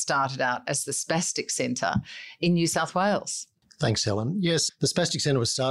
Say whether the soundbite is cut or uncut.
uncut